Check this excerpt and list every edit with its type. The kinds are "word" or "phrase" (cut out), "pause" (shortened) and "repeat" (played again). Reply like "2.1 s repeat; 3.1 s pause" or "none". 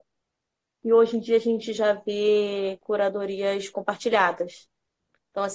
none